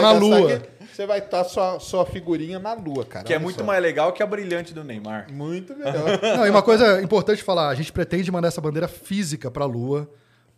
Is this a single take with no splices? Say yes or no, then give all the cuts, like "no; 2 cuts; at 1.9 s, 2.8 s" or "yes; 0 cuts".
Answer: yes; 0 cuts